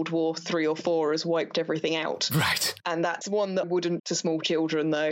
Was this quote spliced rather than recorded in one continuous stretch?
yes; 3 cuts; at 3.2 s, 3.6 s, 4.0 s

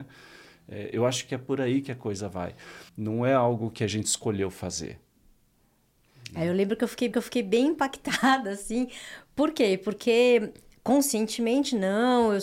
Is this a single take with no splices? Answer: no; 2 cuts; at 2.9 s, 7.1 s

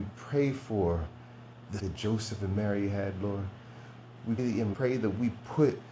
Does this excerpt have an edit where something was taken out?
yes; 3 cuts; at 1.8 s, 4.4 s, 4.7 s

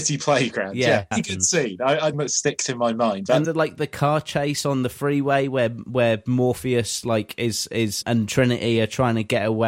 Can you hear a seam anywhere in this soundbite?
yes; 4 cuts; at 1.1 s, 2.1 s, 3.4 s, 8.0 s

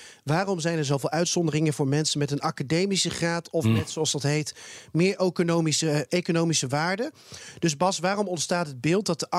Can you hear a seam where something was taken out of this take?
no; 0 cuts

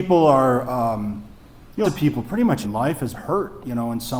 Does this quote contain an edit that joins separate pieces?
yes; 3 cuts; at 1.8 s, 2.6 s, 3.1 s

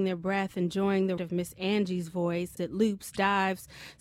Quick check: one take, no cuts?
no; 2 cuts; at 1.2 s, 2.6 s

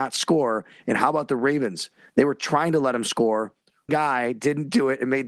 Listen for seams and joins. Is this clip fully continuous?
no; 1 cut; at 3.9 s

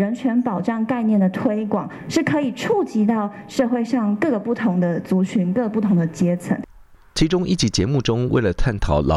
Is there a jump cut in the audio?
no; 0 cuts

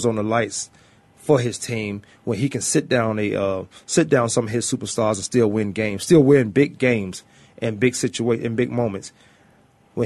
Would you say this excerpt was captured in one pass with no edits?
yes; 0 cuts

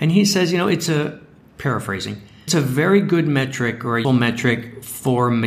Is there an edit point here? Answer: yes; 2 cuts; at 2.5 s, 4.0 s

